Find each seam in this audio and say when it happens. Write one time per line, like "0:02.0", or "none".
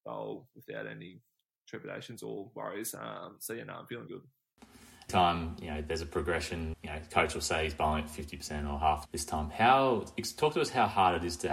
0:04.1
0:05.1
0:06.7
0:09.1